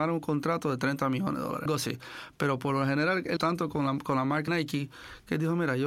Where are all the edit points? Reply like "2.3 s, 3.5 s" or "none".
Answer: 1.7 s, 3.4 s, 4.5 s